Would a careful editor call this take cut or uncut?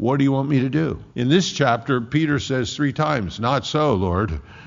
cut